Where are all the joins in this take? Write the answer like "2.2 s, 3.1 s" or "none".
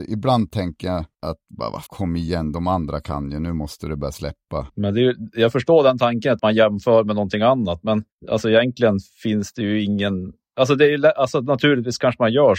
1.1 s, 1.9 s, 4.7 s, 6.4 s